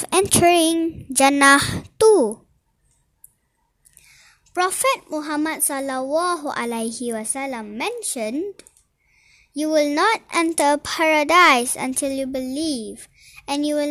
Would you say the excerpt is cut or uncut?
uncut